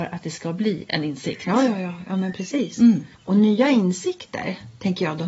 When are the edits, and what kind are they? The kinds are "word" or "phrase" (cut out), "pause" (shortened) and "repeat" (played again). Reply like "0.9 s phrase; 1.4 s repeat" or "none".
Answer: 3.1 s pause